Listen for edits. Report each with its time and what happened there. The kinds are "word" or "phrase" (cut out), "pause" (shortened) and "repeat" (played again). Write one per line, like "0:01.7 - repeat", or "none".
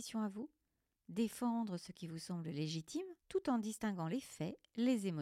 0:03.2 - pause